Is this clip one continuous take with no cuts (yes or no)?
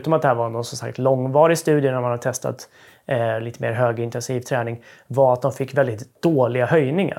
yes